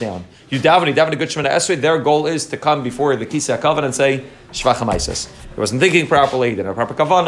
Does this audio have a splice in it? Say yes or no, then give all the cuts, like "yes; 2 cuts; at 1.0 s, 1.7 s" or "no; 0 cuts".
no; 0 cuts